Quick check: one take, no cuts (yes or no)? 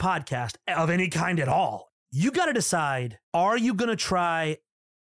no